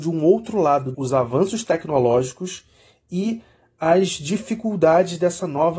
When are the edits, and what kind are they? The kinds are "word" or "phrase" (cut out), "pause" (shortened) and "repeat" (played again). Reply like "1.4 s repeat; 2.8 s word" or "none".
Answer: 0.9 s phrase